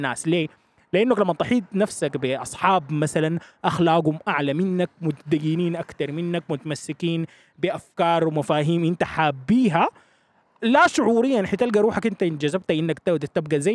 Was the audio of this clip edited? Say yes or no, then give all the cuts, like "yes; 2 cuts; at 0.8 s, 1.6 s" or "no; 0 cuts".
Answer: no; 0 cuts